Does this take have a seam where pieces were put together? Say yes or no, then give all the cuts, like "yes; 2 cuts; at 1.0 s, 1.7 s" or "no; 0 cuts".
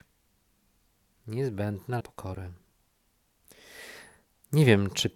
yes; 1 cut; at 2.0 s